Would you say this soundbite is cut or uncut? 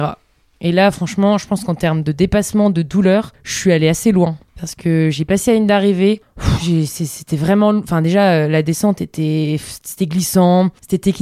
uncut